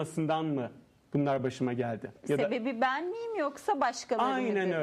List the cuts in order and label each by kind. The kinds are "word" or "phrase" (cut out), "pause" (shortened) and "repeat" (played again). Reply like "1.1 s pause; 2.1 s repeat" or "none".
none